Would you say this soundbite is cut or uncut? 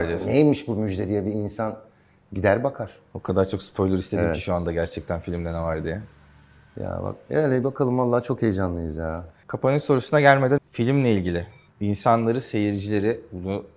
cut